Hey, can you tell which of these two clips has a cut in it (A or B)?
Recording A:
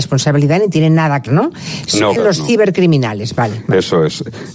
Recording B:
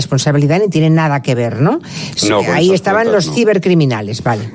A